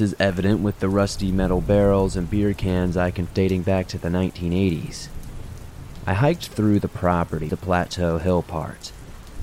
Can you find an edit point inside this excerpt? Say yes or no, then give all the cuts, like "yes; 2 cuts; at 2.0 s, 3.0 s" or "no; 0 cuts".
yes; 2 cuts; at 3.3 s, 7.5 s